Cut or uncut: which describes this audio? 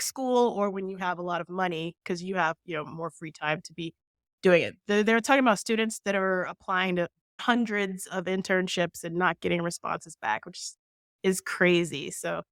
uncut